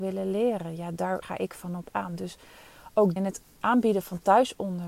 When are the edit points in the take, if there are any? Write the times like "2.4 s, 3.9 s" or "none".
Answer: 1.2 s, 3.2 s